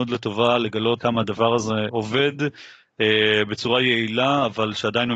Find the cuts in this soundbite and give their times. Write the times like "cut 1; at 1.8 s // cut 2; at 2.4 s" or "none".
cut 1; at 1.0 s // cut 2; at 1.9 s